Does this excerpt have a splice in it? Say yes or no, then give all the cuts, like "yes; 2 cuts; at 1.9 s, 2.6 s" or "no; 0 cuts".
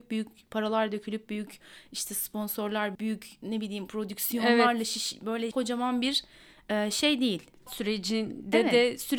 yes; 4 cuts; at 1.3 s, 2.9 s, 5.5 s, 7.7 s